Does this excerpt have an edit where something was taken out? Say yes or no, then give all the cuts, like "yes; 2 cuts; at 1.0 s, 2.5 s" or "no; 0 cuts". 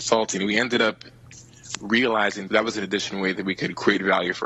yes; 1 cut; at 2.5 s